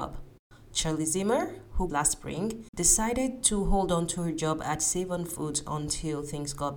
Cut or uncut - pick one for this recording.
cut